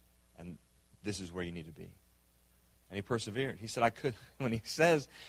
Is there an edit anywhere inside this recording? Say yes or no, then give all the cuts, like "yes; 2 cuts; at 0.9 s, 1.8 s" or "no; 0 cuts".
no; 0 cuts